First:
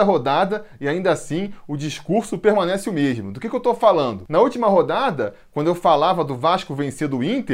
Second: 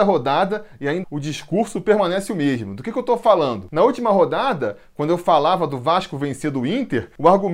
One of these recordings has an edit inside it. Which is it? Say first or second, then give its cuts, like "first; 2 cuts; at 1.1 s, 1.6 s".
second; 1 cut; at 1.0 s